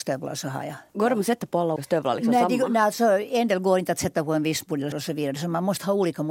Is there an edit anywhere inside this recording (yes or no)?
yes